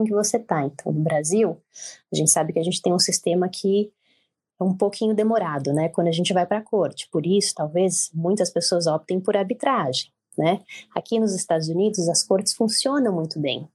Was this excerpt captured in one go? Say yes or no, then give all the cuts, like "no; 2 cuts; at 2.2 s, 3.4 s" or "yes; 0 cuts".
yes; 0 cuts